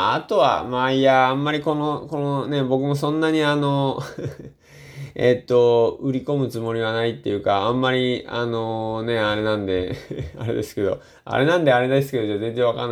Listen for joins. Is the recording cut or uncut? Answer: uncut